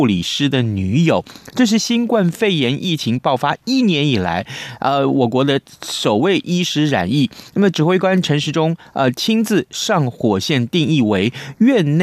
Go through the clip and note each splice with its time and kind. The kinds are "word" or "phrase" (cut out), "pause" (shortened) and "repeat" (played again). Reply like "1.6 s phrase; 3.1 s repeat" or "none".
none